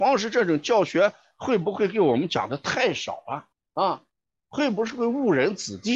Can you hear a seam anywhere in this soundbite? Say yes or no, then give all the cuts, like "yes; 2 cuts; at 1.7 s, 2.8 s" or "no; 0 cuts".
no; 0 cuts